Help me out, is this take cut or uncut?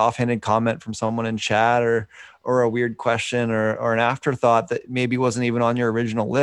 uncut